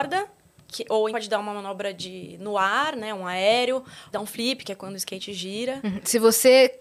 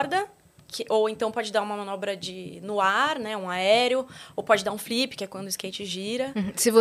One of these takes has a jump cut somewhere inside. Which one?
first; 2 cuts; at 1.1 s, 4.1 s

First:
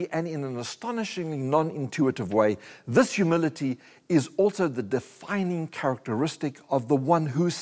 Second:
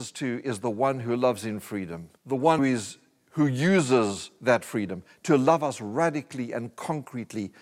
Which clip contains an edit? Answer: second; 2 cuts; at 2.2 s, 2.6 s

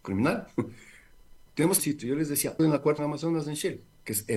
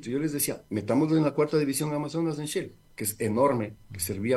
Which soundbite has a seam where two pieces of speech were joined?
first; 4 cuts; at 1.5 s, 1.8 s, 2.6 s, 3.0 s

